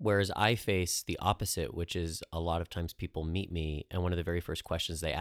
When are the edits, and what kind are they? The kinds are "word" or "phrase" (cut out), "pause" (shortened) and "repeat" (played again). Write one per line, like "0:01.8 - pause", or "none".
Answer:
none